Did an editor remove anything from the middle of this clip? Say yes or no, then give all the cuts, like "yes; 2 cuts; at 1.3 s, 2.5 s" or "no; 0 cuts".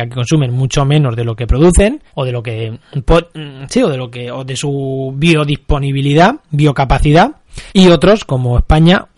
yes; 2 cuts; at 2.1 s, 7.7 s